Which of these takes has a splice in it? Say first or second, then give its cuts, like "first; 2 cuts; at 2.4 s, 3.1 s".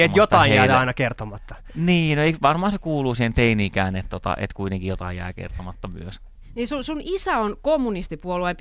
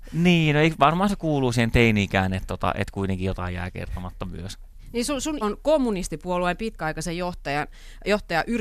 second; 1 cut; at 5.4 s